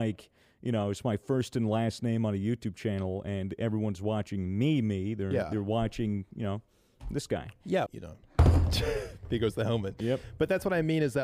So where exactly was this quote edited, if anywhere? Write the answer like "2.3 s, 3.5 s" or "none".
7.9 s